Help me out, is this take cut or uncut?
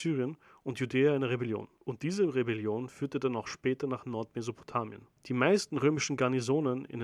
cut